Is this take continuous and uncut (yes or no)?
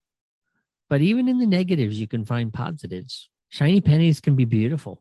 no